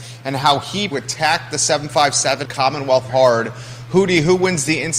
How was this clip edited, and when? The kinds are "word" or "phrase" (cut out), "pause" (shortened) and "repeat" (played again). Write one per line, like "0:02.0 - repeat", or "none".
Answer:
0:00.9 - phrase
0:02.4 - phrase
0:03.1 - word